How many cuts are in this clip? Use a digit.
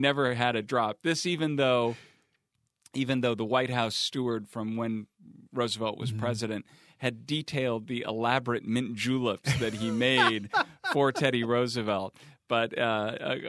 0